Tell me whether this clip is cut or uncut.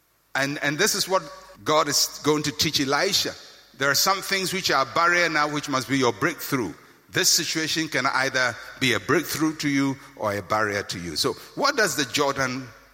cut